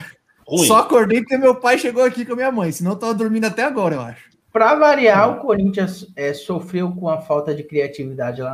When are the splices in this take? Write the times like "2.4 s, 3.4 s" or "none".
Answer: 4.4 s